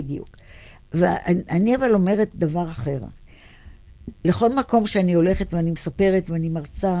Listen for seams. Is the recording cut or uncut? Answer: uncut